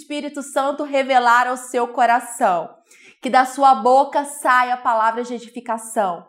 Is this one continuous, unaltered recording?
yes; 0 cuts

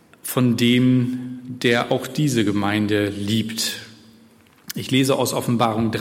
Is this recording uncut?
yes; 0 cuts

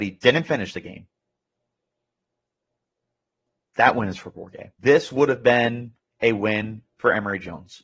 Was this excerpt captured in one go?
no; 1 cut; at 4.8 s

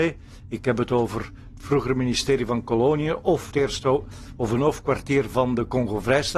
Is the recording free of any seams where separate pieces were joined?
no; 1 cut; at 3.5 s

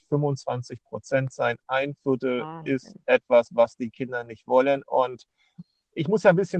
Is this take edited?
no; 0 cuts

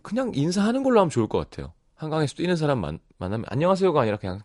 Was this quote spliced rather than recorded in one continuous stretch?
no; 0 cuts

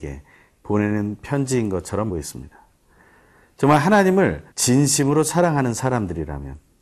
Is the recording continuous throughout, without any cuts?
no; 2 cuts; at 2.1 s, 4.5 s

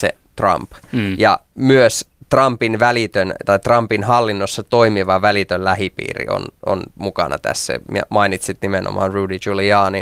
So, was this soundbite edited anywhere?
no; 0 cuts

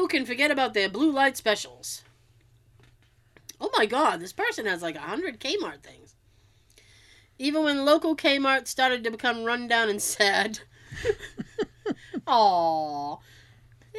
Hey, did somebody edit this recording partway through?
no; 0 cuts

